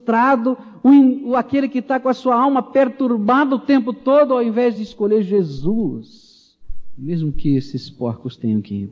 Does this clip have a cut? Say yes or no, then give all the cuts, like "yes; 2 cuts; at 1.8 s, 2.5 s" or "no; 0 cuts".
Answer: no; 0 cuts